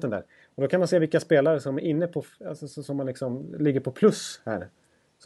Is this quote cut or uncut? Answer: uncut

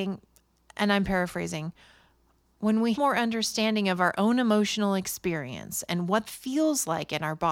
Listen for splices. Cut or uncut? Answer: cut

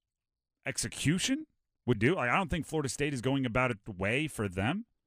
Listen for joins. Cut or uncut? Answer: cut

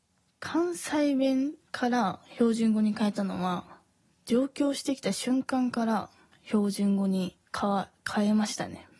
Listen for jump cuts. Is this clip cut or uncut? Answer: cut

